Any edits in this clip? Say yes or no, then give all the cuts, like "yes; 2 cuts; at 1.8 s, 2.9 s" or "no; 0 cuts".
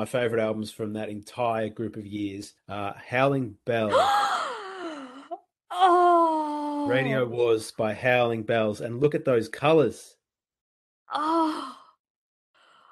yes; 2 cuts; at 2.6 s, 10.8 s